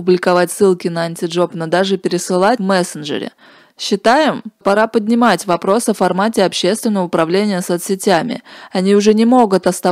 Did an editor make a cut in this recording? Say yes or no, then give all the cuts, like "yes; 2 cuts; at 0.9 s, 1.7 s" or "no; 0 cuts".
yes; 2 cuts; at 2.6 s, 4.6 s